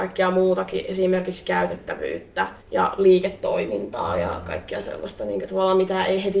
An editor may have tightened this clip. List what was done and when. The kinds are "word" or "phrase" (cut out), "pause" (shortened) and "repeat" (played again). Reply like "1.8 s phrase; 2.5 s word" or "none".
2.6 s pause